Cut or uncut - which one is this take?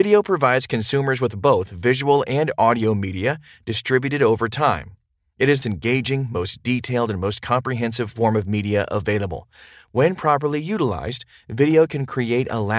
cut